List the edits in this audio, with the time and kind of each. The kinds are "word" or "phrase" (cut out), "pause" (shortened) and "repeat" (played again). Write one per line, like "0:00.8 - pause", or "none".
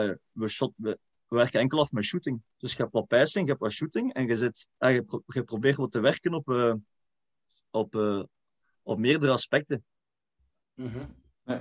0:02.5 - pause
0:04.7 - pause